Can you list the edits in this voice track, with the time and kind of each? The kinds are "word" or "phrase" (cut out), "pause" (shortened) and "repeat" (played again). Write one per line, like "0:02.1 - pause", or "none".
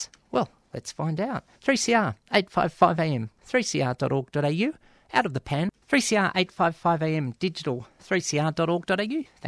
0:01.6 - pause
0:03.4 - word
0:05.8 - pause